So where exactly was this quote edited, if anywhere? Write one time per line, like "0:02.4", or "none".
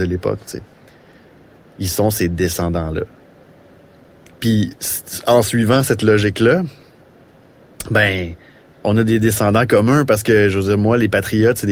none